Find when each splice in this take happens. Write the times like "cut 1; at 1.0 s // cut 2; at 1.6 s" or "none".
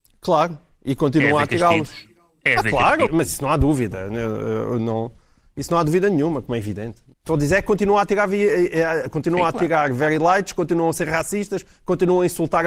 cut 1; at 3.1 s // cut 2; at 7.1 s